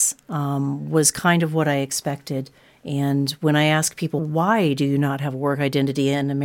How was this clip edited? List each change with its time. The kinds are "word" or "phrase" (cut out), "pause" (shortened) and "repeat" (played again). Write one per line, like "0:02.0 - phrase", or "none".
none